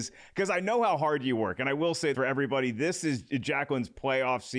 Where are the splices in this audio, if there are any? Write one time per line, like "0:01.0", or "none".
0:02.1

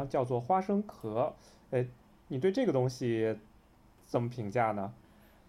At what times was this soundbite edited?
none

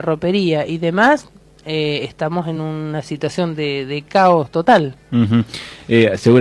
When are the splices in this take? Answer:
none

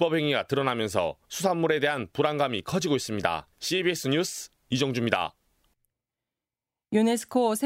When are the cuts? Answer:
0:01.2
0:03.5

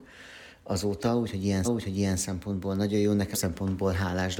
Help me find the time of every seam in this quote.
0:01.6
0:03.3

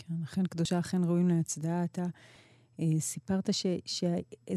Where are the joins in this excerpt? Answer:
none

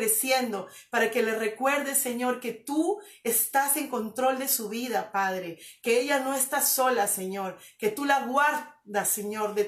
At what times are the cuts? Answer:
none

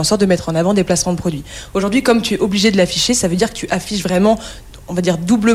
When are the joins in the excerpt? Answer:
none

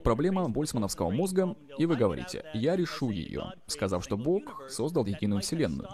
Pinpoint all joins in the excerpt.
none

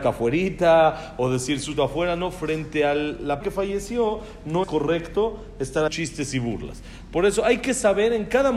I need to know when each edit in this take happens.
0:01.8
0:03.4
0:04.6
0:05.9

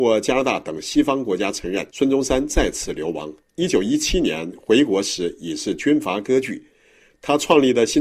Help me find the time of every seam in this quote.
0:01.9

